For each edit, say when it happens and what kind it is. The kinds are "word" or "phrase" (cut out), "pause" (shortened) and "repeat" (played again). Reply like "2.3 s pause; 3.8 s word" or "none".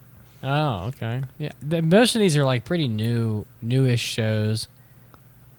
none